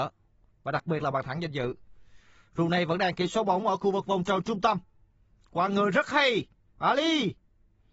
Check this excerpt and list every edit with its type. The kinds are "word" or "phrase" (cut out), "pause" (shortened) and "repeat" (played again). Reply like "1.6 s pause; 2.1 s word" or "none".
none